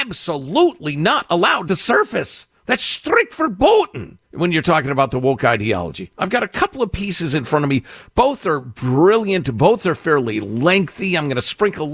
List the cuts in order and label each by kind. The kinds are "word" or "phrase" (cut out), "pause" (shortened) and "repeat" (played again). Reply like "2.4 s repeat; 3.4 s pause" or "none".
1.7 s phrase; 2.6 s pause; 4.2 s pause